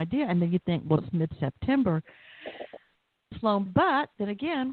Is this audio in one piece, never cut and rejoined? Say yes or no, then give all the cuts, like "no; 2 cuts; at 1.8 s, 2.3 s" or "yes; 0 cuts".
no; 3 cuts; at 1.0 s, 3.3 s, 3.7 s